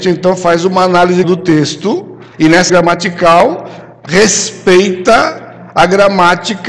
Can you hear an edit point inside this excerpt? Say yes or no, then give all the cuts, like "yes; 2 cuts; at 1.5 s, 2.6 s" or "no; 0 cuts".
yes; 4 cuts; at 1.2 s, 2.3 s, 2.7 s, 4.1 s